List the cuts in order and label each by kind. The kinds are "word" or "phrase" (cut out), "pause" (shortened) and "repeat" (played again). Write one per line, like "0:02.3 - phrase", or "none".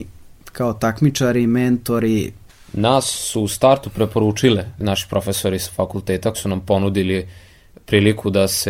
0:06.3 - word